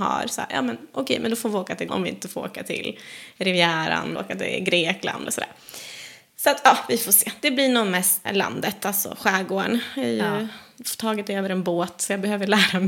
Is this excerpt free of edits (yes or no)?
no